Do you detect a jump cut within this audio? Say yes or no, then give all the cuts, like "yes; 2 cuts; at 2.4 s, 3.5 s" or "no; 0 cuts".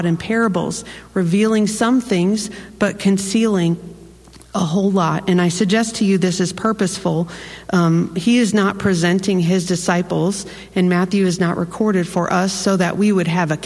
no; 0 cuts